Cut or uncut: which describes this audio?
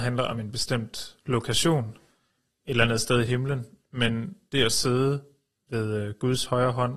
uncut